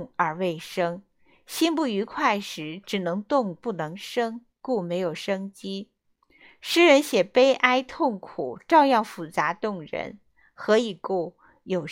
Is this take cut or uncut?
uncut